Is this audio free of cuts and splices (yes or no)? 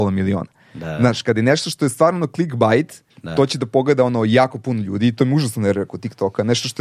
no